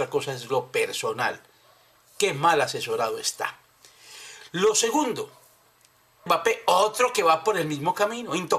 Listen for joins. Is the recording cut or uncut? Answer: cut